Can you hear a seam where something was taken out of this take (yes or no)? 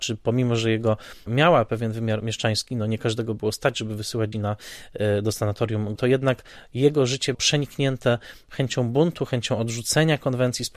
yes